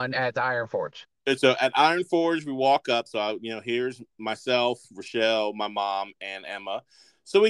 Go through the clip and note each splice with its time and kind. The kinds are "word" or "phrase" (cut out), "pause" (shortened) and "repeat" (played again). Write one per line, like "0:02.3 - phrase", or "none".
none